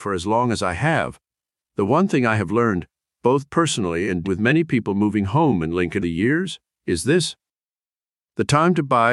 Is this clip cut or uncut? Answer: cut